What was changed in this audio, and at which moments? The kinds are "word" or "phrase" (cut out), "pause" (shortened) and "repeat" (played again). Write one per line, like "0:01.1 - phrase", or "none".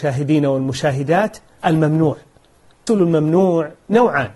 0:01.6 - word
0:02.9 - word